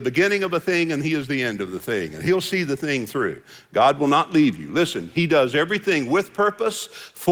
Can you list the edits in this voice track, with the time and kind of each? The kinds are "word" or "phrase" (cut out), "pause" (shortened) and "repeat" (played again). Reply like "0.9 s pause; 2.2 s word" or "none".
none